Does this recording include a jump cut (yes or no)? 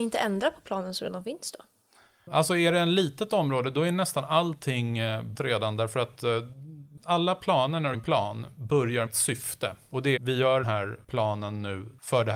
yes